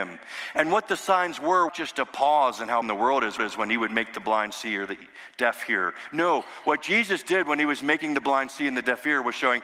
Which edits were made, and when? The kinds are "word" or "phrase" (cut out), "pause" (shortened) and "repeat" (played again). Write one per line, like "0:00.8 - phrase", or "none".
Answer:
0:01.7 - phrase
0:02.8 - word
0:03.4 - repeat